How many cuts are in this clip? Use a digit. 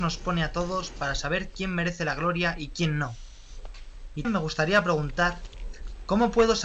1